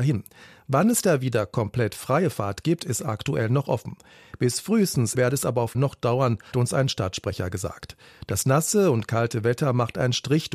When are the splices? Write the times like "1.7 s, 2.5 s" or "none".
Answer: 5.1 s, 5.7 s, 6.5 s